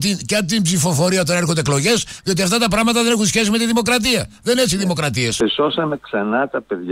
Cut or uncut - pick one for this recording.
uncut